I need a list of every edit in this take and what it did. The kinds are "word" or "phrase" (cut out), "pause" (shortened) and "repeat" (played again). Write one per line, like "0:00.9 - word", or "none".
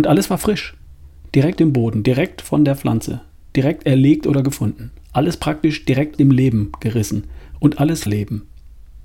0:01.6 - word
0:06.2 - word
0:08.1 - word